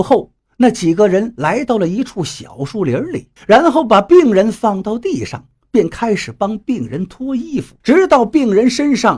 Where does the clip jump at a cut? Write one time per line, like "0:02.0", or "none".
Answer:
0:03.4
0:07.8